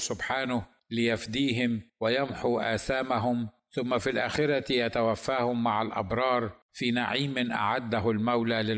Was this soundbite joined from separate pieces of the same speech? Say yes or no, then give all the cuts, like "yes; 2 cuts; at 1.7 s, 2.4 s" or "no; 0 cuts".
no; 0 cuts